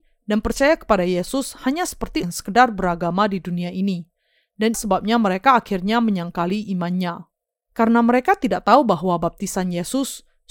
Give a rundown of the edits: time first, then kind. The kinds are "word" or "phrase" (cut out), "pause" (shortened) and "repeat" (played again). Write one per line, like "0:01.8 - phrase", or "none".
0:02.2 - word
0:04.7 - word